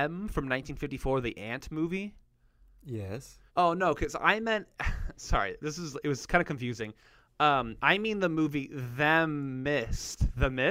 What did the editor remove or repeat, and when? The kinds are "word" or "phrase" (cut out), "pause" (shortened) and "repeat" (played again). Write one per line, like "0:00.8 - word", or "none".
0:03.5 - pause